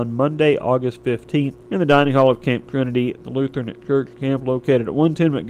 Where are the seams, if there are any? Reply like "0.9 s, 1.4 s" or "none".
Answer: 1.6 s